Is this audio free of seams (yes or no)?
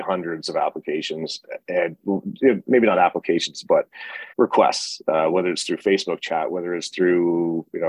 no